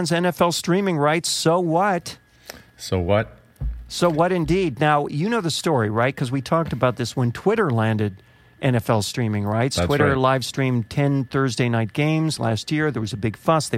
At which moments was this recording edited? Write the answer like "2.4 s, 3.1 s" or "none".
none